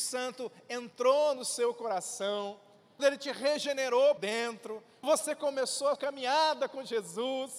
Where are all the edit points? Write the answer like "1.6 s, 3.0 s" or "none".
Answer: 3.0 s, 4.2 s, 5.0 s, 6.0 s

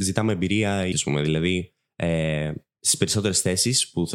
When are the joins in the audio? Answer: 0.9 s

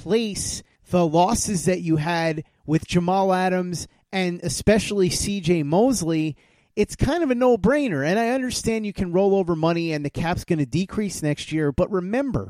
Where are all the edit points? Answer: none

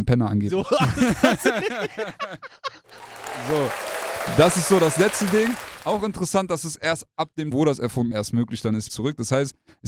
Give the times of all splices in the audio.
7.5 s, 8.1 s, 8.9 s

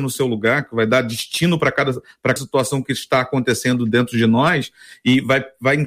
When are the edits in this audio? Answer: 2.4 s

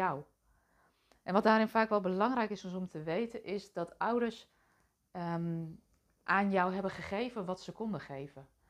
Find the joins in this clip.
none

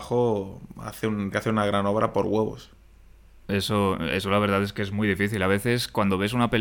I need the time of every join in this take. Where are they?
1.3 s

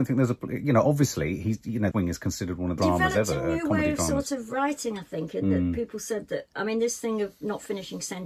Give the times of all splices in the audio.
1.9 s, 2.8 s

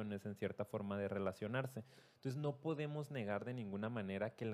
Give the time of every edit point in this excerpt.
none

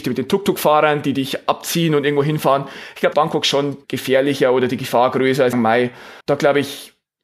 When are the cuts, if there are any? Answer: 3.1 s, 3.8 s, 5.5 s, 6.2 s

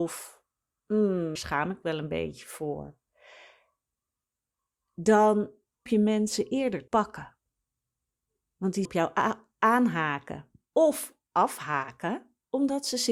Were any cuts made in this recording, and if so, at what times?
1.4 s, 1.8 s, 5.9 s, 6.9 s, 8.8 s

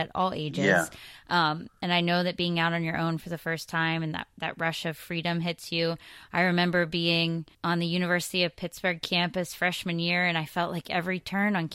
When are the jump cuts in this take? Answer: 7.5 s

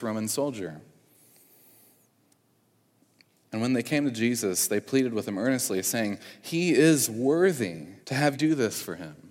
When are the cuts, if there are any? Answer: 8.0 s, 8.3 s

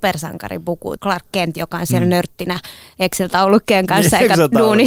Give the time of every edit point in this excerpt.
1.0 s

